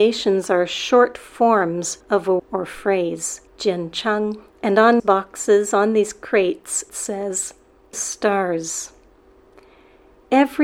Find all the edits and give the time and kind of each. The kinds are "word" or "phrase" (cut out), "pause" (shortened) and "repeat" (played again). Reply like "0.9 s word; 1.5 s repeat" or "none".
2.0 s pause; 2.4 s word; 3.5 s pause; 4.5 s pause; 5.0 s word; 6.9 s word; 7.9 s phrase